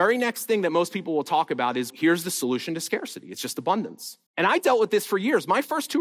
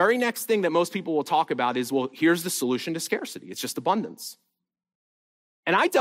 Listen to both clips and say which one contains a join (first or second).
first